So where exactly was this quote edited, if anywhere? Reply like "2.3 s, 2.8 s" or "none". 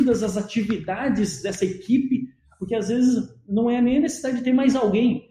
none

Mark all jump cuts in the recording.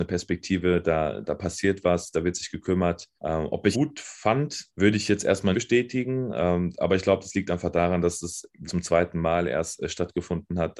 1.2 s, 3.2 s, 3.7 s, 4.7 s, 5.5 s, 8.7 s

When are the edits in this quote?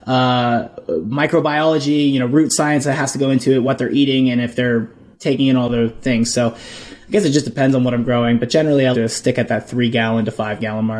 5.1 s, 8.9 s

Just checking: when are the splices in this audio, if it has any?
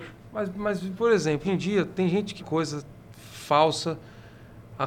0.9 s, 1.4 s, 2.4 s

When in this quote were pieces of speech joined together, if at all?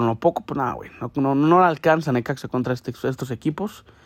none

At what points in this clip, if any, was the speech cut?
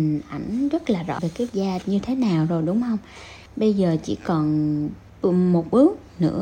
1.2 s, 1.5 s, 1.8 s, 3.5 s, 5.1 s

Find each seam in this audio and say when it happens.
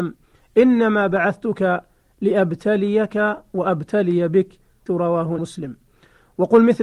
4.9 s, 5.4 s

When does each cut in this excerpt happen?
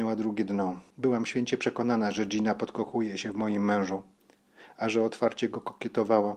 0.9 s

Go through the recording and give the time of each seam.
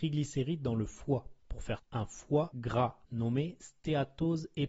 1.4 s, 1.8 s, 3.0 s

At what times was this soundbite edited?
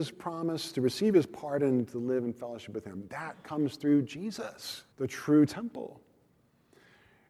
4.9 s

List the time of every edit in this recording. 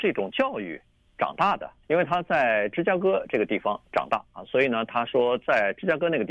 1.8 s

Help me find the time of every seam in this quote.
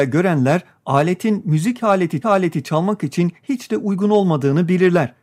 2.2 s

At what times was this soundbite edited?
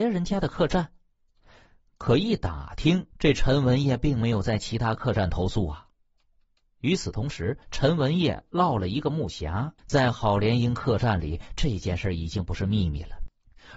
3.1 s, 7.6 s, 9.8 s

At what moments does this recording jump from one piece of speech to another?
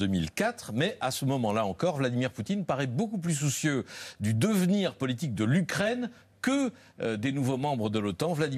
none

